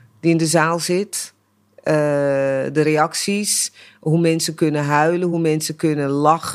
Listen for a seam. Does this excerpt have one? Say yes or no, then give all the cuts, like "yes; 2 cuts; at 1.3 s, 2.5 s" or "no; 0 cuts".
no; 0 cuts